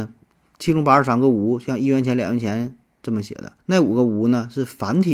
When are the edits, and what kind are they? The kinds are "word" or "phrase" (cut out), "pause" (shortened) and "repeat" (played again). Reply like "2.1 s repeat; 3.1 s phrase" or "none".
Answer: 3.6 s pause